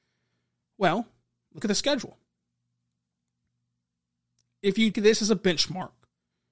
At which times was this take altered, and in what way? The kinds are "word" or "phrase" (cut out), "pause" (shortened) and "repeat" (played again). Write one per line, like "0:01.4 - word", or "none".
0:01.6 - word
0:04.9 - word